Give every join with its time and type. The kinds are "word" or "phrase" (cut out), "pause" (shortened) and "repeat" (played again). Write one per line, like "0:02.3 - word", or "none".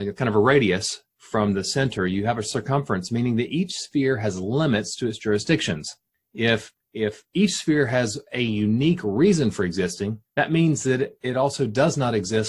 0:01.1 - pause
0:10.3 - pause

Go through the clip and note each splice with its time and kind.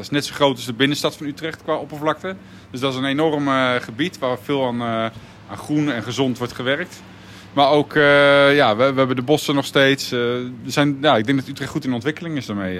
none

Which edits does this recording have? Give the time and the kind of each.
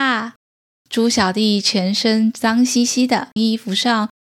0:03.4 - phrase

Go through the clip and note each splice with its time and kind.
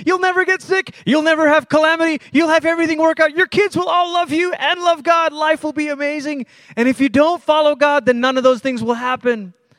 none

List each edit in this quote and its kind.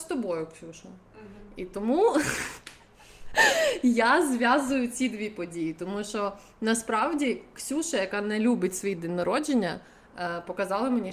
none

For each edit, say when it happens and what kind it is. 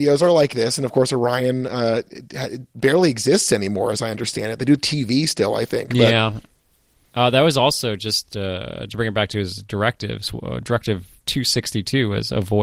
none

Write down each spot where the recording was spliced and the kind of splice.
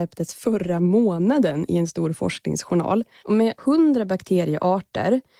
0:03.6 - word

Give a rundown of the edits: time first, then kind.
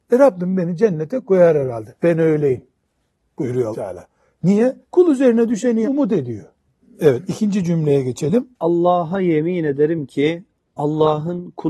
0:03.7 - word
0:04.8 - pause
0:05.8 - phrase
0:06.8 - pause
0:08.5 - pause

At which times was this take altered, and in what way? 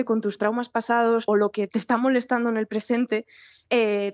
0:01.3 - phrase

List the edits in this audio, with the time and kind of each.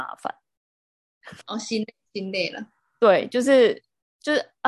0:01.4 - pause
0:02.0 - pause

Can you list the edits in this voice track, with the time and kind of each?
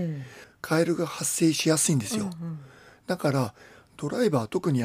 none

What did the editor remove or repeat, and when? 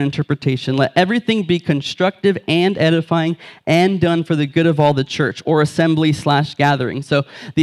none

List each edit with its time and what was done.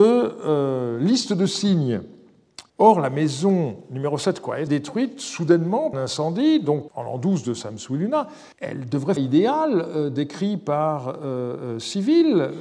0:02.7 - pause
0:04.7 - phrase
0:05.9 - phrase
0:06.9 - word
0:08.5 - pause
0:09.2 - phrase

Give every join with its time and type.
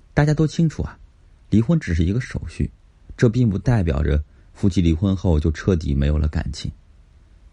none

